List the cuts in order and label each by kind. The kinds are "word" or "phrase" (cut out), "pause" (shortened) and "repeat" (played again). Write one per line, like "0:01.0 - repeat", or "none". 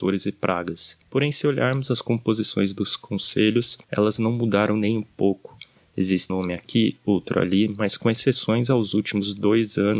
0:01.0 - pause
0:03.8 - pause
0:06.3 - word